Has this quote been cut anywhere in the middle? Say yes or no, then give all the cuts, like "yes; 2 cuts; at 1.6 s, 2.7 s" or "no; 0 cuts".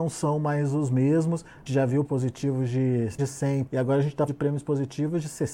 yes; 5 cuts; at 1.7 s, 2.0 s, 3.2 s, 3.7 s, 4.3 s